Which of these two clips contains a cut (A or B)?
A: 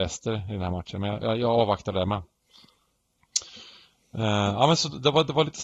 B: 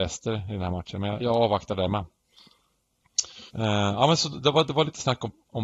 B